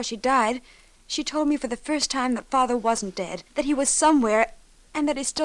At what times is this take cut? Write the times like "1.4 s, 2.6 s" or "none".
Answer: 3.5 s